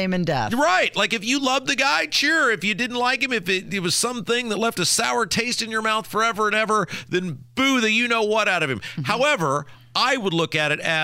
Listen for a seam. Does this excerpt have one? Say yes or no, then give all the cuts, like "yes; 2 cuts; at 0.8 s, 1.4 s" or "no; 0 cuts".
no; 0 cuts